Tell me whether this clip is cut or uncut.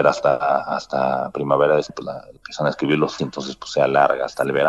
cut